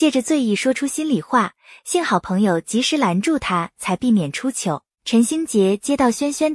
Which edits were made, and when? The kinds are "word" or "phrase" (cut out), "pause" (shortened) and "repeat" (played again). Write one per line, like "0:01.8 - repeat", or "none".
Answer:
0:04.9 - pause